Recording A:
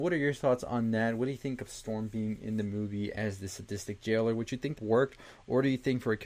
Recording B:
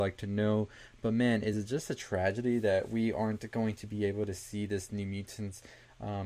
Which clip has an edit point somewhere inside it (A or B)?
A